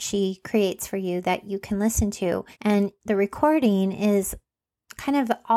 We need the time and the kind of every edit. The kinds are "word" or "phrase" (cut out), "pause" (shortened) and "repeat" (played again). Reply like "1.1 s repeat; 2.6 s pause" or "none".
2.5 s pause